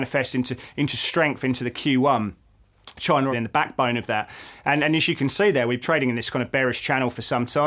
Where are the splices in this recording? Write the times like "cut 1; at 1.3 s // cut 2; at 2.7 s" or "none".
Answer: cut 1; at 3.3 s // cut 2; at 5.8 s